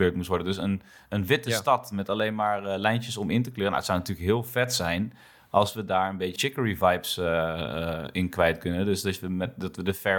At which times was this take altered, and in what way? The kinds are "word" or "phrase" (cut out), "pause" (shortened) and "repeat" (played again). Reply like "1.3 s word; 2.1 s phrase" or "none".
6.4 s word